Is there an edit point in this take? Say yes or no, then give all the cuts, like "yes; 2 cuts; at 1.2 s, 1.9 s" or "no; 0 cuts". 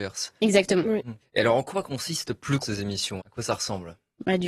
yes; 3 cuts; at 1.2 s, 2.6 s, 3.2 s